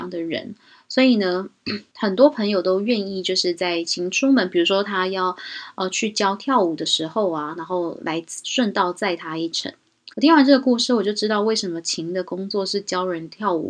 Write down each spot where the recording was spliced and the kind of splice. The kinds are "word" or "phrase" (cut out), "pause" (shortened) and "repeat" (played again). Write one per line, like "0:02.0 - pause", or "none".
0:01.9 - pause
0:10.1 - pause